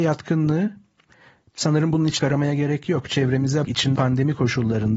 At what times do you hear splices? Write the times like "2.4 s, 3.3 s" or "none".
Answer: 2.2 s, 3.6 s, 4.0 s